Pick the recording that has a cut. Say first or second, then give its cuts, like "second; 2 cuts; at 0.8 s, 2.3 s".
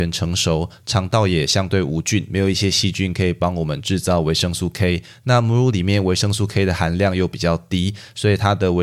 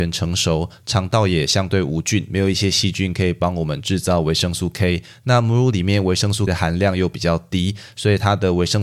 second; 1 cut; at 6.5 s